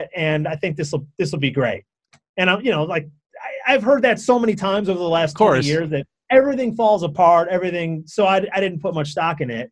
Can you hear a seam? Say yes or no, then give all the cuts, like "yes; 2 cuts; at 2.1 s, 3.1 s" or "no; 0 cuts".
no; 0 cuts